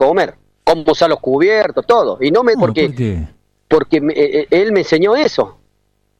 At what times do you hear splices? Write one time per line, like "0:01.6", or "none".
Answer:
0:02.5